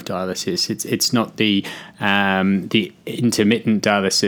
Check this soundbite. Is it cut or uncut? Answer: uncut